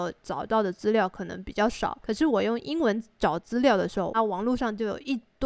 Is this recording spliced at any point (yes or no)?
yes